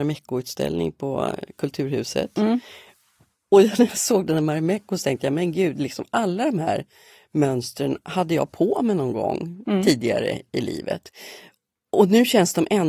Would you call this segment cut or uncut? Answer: uncut